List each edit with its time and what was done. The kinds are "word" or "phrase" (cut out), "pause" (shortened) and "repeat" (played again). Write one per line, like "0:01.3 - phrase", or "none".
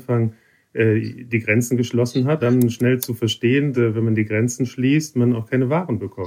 0:02.4 - word
0:03.7 - word